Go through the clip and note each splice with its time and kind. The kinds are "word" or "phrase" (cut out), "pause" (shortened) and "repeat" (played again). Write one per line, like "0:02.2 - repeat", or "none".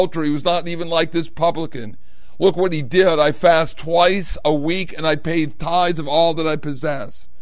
none